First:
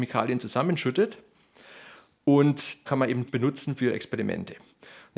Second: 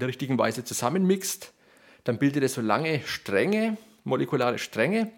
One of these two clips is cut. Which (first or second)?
first